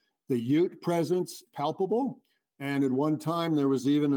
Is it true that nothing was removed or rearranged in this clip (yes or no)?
no